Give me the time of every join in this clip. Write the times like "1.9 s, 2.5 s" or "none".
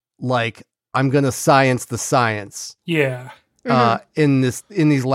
none